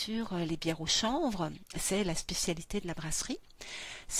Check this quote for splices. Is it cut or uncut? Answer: uncut